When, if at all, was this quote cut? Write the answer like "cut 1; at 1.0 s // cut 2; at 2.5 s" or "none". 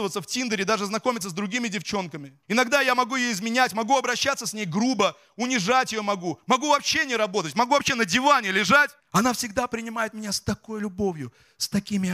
cut 1; at 2.4 s // cut 2; at 9.0 s